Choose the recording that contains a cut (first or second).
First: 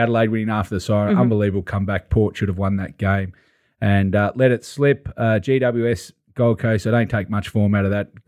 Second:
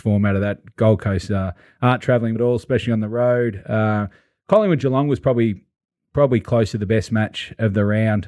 second